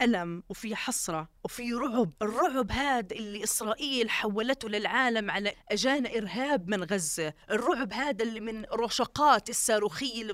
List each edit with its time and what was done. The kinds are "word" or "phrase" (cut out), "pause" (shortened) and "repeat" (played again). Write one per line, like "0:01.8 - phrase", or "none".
0:01.4 - pause
0:02.2 - pause
0:05.5 - word
0:07.4 - pause